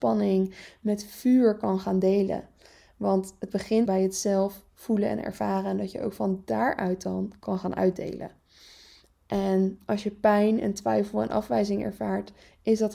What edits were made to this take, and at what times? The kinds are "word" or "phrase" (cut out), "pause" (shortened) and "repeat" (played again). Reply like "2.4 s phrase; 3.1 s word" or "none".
3.9 s word